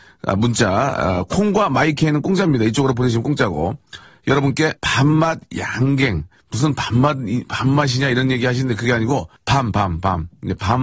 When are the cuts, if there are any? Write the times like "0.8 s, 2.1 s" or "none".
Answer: 4.8 s, 6.3 s, 9.4 s